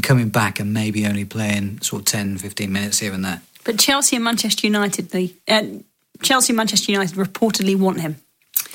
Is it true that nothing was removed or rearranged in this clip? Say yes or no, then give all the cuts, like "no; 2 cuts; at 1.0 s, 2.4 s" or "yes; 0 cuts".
yes; 0 cuts